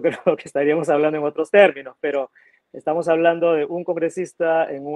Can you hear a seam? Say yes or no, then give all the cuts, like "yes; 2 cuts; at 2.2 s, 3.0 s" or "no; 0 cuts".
no; 0 cuts